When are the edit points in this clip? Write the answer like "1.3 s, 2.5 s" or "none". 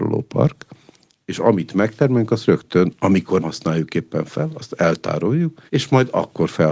3.4 s, 5.7 s